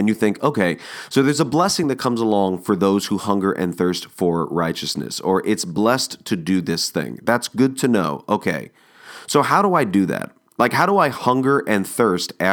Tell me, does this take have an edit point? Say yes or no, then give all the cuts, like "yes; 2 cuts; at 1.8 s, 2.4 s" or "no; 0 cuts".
no; 0 cuts